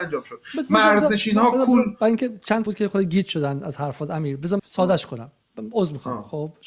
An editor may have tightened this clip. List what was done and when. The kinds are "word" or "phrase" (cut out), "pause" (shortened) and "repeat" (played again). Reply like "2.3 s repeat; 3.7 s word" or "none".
2.7 s phrase; 4.6 s word